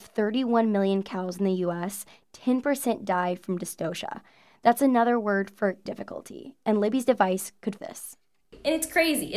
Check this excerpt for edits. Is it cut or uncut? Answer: cut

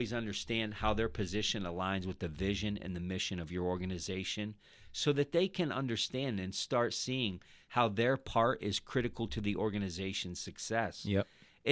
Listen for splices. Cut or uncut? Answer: uncut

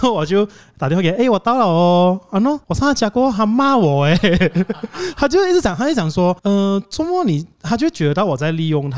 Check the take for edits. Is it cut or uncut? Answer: cut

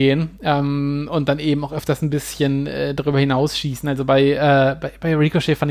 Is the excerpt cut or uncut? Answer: uncut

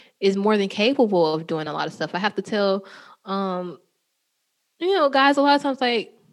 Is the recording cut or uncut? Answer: uncut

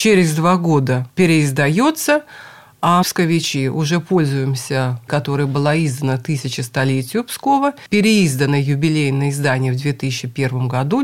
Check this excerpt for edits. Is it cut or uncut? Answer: cut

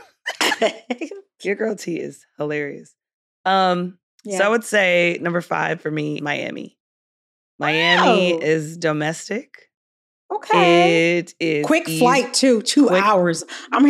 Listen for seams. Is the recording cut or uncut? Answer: cut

